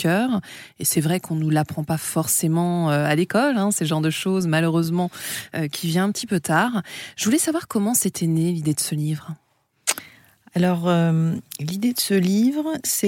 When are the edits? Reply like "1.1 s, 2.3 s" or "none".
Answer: none